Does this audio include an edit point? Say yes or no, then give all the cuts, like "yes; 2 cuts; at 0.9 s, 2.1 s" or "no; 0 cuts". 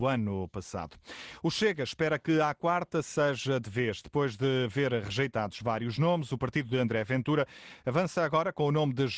no; 0 cuts